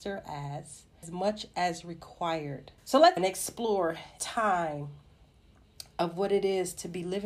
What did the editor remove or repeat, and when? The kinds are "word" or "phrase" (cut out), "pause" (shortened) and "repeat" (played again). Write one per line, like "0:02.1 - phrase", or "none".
0:01.0 - phrase
0:02.8 - pause
0:03.2 - word
0:04.2 - phrase